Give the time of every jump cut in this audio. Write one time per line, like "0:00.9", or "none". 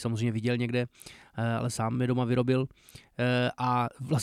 none